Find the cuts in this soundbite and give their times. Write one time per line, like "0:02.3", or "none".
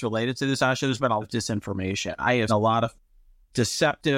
0:01.2
0:02.5